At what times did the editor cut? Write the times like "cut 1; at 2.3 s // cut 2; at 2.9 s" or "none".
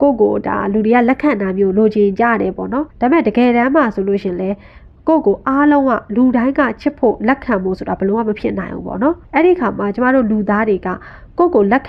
cut 1; at 2.9 s // cut 2; at 9.2 s

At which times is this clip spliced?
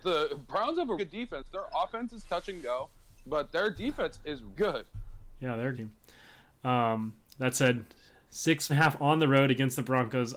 cut 1; at 1.0 s // cut 2; at 4.6 s // cut 3; at 5.7 s // cut 4; at 8.7 s

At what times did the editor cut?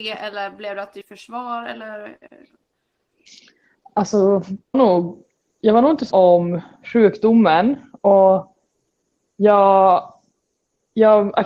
cut 1; at 1.0 s // cut 2; at 4.7 s // cut 3; at 6.1 s

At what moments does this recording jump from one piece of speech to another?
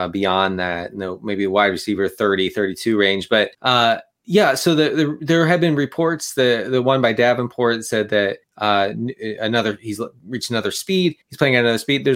cut 1; at 3.5 s // cut 2; at 8.4 s // cut 3; at 11.2 s

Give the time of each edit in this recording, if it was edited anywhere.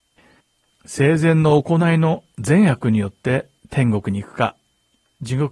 cut 1; at 3.6 s

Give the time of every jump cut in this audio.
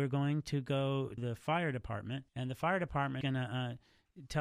cut 1; at 1.2 s // cut 2; at 2.3 s // cut 3; at 3.2 s

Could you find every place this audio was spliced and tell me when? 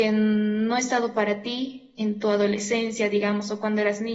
none

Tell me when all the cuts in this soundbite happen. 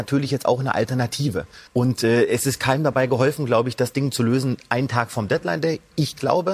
cut 1; at 1.7 s

